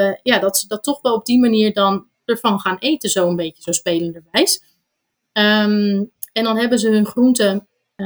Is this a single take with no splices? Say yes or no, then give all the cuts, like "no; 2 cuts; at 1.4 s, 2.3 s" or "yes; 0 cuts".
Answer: yes; 0 cuts